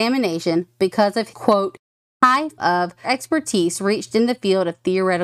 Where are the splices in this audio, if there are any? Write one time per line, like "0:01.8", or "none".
0:01.3
0:02.6
0:03.0